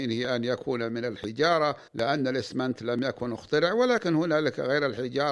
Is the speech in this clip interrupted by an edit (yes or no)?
yes